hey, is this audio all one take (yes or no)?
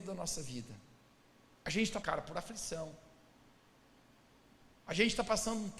no